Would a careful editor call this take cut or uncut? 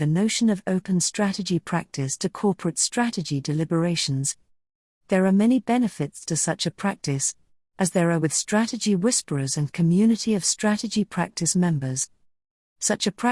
uncut